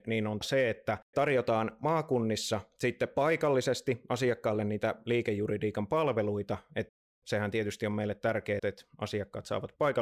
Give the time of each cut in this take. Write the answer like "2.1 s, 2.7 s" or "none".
8.6 s